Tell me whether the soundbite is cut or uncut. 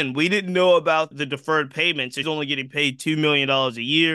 cut